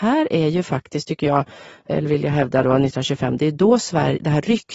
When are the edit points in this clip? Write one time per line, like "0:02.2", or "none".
none